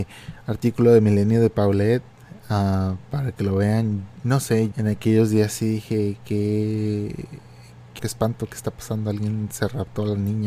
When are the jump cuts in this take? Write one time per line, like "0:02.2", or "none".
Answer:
0:04.7
0:08.0

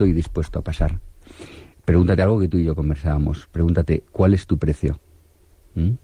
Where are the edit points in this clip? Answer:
none

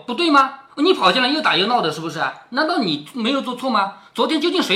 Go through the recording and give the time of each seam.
none

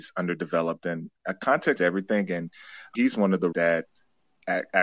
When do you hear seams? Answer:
0:01.8
0:02.9
0:03.5

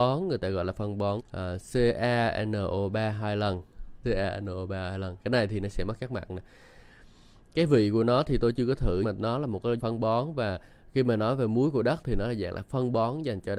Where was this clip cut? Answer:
0:01.2
0:04.0
0:09.0
0:09.8

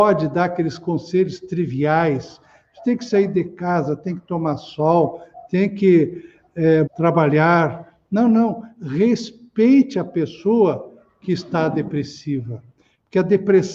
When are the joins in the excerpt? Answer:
0:06.9

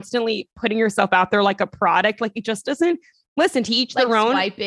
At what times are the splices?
none

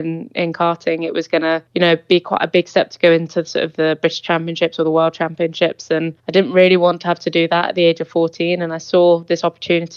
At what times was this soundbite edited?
0:01.7
0:06.2

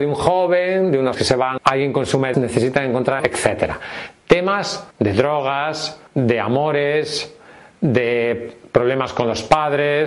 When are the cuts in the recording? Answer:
0:01.1
0:01.6
0:02.3
0:03.2
0:04.9
0:06.1

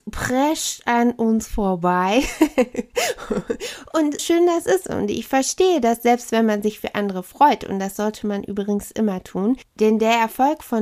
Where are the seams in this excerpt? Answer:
0:04.2

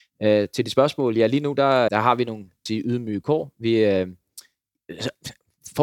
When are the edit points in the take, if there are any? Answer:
0:01.9
0:02.7

